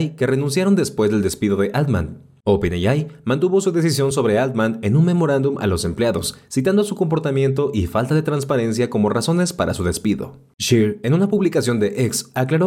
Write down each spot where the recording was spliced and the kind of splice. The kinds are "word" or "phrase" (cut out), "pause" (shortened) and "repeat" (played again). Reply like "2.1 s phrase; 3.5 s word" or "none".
none